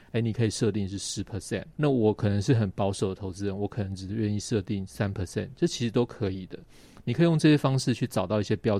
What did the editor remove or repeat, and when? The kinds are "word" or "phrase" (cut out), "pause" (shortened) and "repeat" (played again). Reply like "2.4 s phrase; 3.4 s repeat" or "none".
1.7 s pause